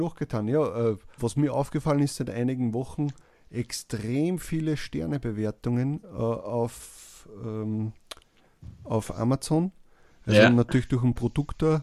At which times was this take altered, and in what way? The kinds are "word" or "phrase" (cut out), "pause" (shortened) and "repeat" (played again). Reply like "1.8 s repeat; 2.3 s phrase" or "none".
1.2 s word